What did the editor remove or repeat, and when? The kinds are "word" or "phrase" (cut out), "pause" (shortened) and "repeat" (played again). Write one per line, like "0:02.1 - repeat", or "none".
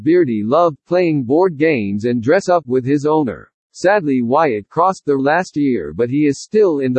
0:03.6 - pause
0:05.2 - word